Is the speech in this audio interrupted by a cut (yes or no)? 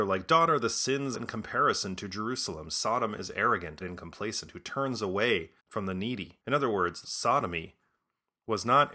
yes